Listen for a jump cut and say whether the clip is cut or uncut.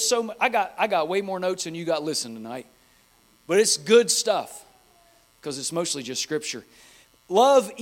uncut